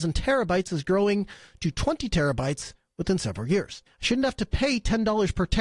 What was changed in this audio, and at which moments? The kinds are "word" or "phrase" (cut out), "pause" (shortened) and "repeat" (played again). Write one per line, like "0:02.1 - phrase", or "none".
0:03.9 - pause